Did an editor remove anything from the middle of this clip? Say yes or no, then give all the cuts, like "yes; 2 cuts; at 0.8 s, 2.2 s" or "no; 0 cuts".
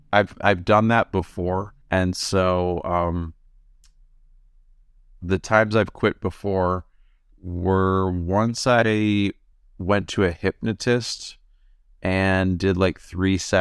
yes; 2 cuts; at 1.8 s, 9.5 s